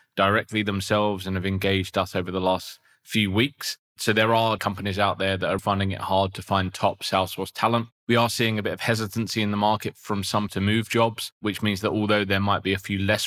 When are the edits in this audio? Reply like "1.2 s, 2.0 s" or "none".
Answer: 4.6 s, 5.6 s, 8.0 s, 10.5 s